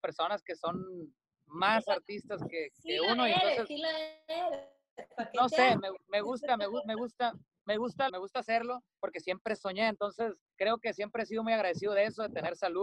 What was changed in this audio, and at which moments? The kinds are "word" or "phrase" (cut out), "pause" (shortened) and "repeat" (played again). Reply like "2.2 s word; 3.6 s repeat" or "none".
8.1 s word